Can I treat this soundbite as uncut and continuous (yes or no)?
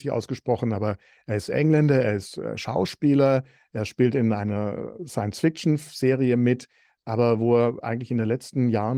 yes